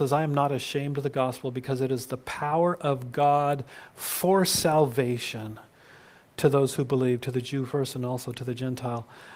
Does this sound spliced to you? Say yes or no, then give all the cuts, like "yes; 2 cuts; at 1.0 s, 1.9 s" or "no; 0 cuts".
no; 0 cuts